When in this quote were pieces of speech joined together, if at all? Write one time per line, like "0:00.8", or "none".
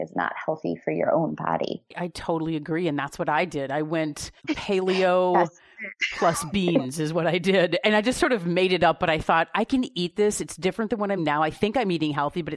0:01.9
0:04.4
0:11.2